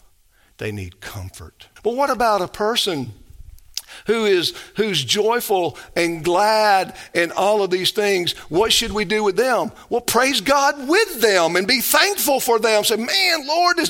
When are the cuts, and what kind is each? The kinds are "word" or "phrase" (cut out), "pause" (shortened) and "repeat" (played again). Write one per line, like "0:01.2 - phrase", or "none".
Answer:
0:01.8 - pause